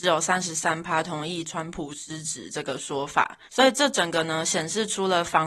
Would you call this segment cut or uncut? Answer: cut